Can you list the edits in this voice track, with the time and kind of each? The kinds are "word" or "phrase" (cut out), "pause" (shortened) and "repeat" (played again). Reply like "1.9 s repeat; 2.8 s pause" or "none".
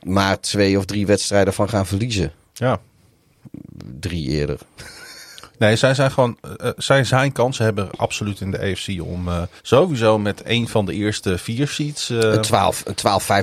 9.6 s pause